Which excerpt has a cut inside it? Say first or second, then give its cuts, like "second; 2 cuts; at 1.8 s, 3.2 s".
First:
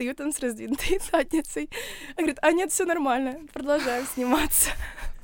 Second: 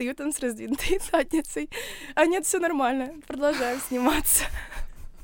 second; 1 cut; at 2.1 s